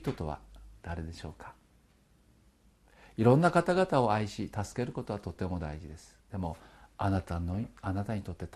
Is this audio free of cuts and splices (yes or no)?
no